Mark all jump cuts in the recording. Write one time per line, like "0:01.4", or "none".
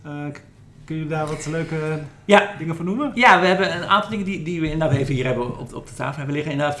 none